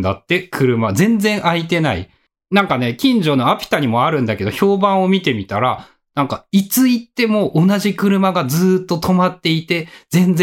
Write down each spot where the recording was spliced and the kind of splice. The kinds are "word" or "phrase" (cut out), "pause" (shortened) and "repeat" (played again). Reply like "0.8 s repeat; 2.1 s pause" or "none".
none